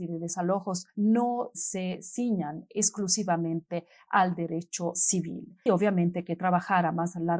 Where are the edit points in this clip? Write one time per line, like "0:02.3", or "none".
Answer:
0:05.7